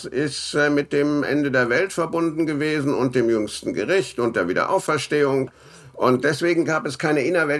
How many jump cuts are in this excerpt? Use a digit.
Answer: 0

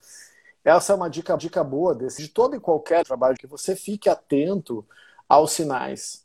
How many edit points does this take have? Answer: 4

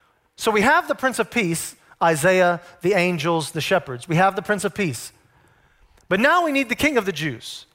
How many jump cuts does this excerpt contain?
0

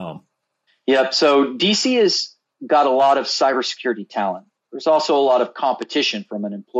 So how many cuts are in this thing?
0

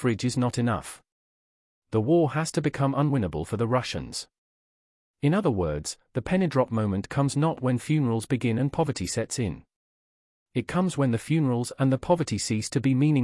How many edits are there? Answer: 0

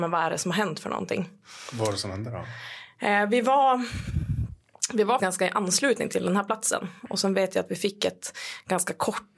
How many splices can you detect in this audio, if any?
2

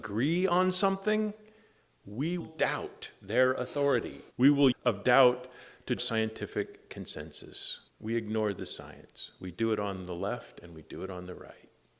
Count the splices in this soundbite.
5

